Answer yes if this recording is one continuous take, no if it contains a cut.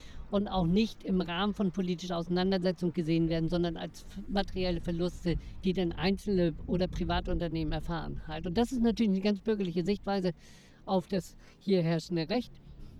yes